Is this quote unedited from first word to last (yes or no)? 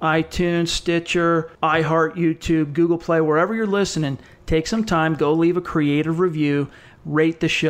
no